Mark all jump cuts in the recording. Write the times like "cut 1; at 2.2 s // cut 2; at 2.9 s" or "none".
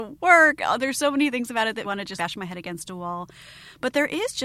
cut 1; at 1.8 s // cut 2; at 2.2 s